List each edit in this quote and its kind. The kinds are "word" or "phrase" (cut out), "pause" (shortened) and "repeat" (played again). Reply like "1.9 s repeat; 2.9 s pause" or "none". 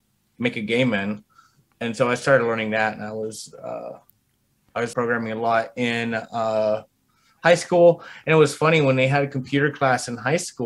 4.9 s word